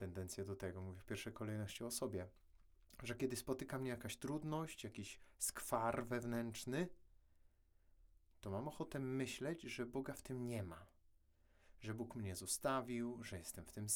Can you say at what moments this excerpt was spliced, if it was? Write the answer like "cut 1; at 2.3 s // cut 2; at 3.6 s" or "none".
none